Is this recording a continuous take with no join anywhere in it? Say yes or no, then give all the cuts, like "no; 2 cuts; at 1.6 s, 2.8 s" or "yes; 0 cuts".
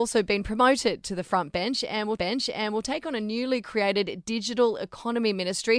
no; 1 cut; at 2.2 s